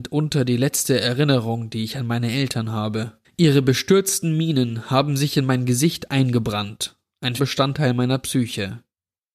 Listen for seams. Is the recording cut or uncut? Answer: cut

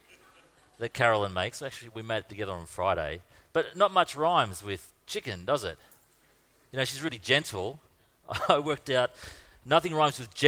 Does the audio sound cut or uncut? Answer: uncut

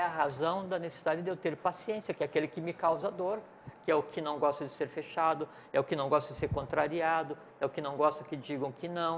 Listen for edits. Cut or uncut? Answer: uncut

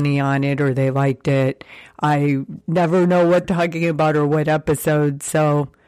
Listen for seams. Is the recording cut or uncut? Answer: cut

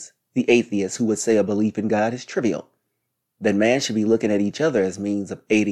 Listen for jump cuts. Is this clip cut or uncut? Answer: uncut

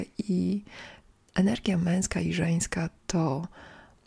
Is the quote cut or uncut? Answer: uncut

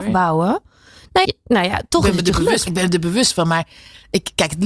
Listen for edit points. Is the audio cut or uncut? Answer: cut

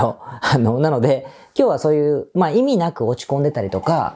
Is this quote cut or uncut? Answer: uncut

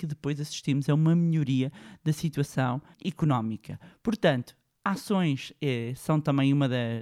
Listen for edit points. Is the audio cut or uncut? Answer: cut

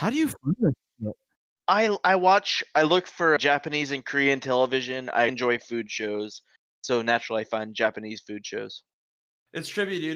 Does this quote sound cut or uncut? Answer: cut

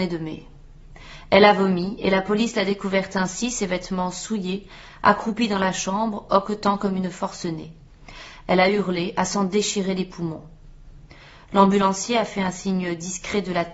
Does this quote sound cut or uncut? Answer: uncut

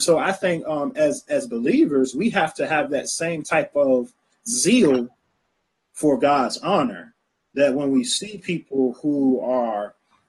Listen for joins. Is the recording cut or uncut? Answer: uncut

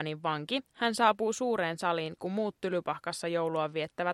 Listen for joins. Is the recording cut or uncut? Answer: uncut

